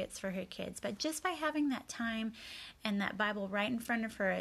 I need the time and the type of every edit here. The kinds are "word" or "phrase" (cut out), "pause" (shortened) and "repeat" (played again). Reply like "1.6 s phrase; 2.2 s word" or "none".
none